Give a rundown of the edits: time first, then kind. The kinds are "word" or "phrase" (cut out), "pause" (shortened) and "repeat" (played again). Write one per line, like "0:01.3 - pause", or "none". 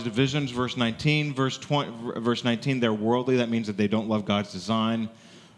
none